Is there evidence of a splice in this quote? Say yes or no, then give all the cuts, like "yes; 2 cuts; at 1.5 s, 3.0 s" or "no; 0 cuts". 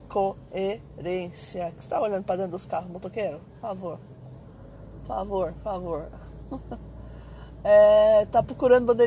no; 0 cuts